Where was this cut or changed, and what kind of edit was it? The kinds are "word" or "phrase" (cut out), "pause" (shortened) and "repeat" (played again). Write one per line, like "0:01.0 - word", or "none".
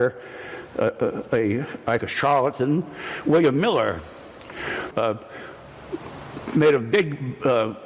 0:02.0 - word
0:04.9 - word